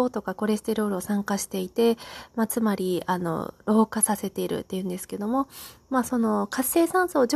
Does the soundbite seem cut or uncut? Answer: uncut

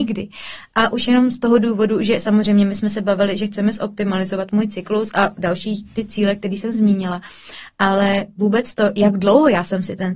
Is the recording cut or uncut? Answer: uncut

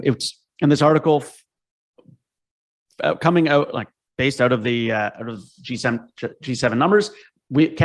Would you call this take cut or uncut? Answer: uncut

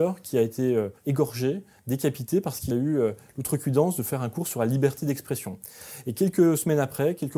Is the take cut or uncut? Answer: cut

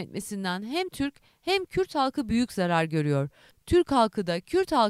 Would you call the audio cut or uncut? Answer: uncut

